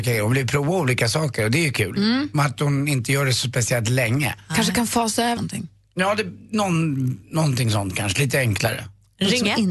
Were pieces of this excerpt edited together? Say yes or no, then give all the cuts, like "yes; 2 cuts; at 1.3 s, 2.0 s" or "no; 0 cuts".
yes; 1 cut; at 5.4 s